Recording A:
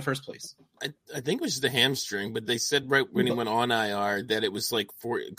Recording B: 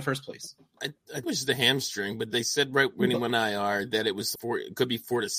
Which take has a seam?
B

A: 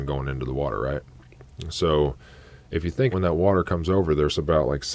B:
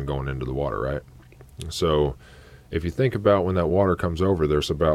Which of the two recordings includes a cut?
A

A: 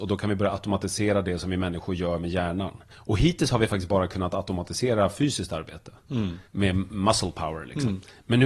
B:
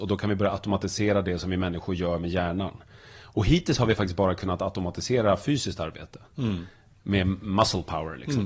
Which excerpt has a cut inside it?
A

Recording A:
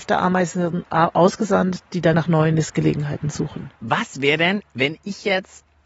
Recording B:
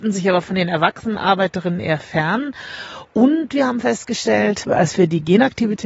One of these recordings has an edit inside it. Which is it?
A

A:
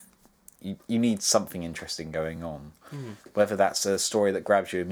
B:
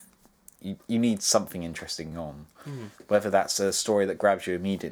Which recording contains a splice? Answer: B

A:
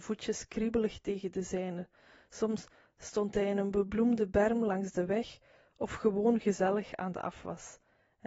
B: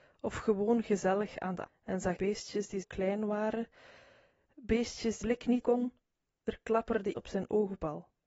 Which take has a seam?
B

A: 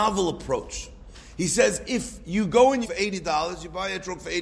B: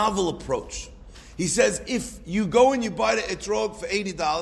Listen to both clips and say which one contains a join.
A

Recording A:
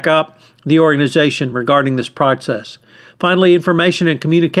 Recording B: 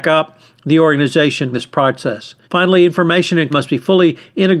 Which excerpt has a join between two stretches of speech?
B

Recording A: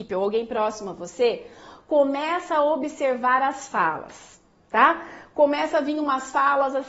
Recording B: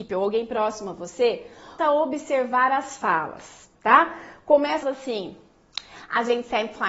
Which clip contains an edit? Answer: B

